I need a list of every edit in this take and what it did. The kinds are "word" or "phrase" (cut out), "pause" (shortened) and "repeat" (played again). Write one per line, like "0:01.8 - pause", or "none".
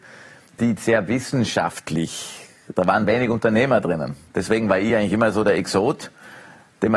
none